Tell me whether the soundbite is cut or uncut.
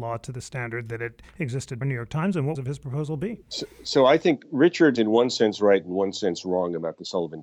cut